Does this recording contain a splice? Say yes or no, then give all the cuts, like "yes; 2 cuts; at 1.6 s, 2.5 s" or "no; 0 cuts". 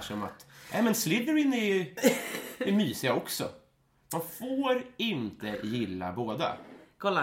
no; 0 cuts